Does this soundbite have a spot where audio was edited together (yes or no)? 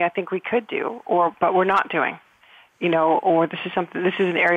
no